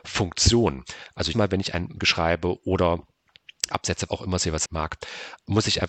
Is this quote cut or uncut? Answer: cut